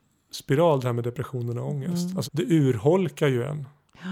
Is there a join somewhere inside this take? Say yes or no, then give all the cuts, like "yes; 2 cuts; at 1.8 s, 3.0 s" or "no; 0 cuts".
yes; 1 cut; at 2.2 s